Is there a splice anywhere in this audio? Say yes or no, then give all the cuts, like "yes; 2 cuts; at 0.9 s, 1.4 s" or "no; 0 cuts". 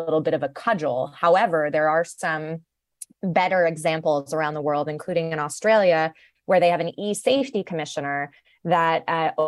no; 0 cuts